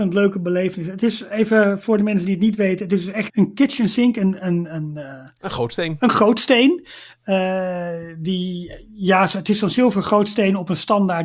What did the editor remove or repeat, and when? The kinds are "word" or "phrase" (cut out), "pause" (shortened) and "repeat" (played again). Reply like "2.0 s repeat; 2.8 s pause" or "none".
3.3 s word